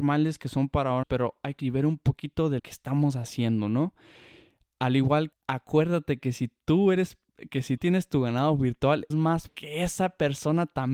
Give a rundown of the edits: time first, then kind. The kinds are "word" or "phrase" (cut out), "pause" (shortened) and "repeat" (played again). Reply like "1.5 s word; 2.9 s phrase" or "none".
1.0 s word; 1.6 s word; 2.6 s word; 5.3 s word; 7.8 s word; 9.1 s word; 9.5 s word